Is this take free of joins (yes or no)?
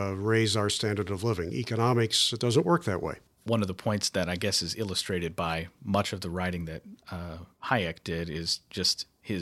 yes